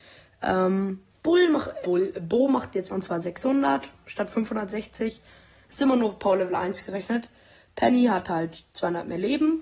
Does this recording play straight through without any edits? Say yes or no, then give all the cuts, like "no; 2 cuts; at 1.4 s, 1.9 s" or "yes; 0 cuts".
no; 3 cuts; at 1.1 s, 1.8 s, 2.9 s